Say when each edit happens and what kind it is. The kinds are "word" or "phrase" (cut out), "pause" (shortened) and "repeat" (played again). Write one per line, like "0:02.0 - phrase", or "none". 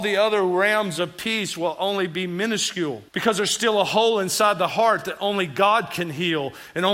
0:03.1 - pause